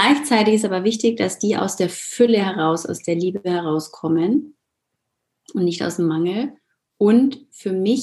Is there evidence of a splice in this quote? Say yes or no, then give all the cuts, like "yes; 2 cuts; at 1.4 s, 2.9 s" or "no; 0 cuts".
no; 0 cuts